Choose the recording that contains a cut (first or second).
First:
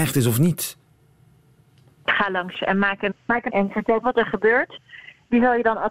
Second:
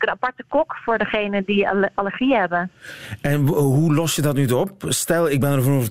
first